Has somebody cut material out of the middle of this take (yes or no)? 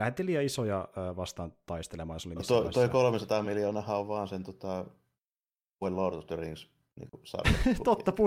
no